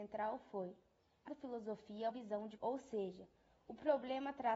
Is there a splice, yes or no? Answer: yes